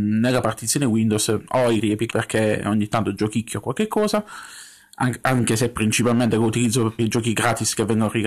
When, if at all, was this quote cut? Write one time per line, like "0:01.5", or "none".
0:01.8
0:02.1
0:07.0